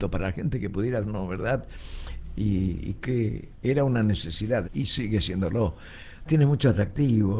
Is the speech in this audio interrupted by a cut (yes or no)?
yes